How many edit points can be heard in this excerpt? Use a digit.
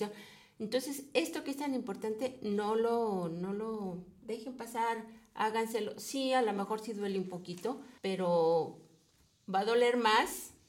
1